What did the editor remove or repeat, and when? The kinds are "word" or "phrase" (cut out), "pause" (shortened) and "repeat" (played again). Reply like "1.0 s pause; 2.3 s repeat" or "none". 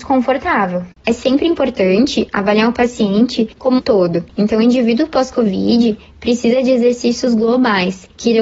3.8 s word